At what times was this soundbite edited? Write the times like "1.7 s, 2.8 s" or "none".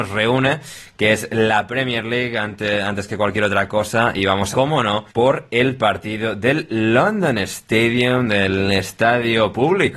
4.5 s, 5.1 s